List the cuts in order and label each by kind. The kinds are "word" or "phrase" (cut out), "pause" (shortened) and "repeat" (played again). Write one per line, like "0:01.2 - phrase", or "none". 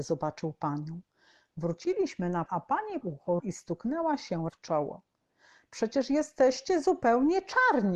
0:02.5 - word
0:03.0 - word
0:03.4 - word
0:04.5 - word